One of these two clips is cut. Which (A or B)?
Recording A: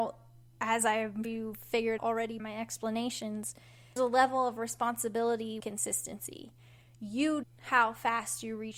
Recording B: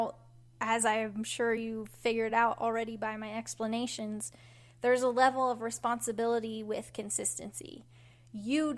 A